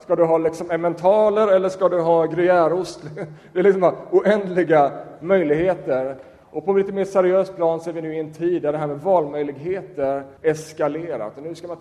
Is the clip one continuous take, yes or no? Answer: no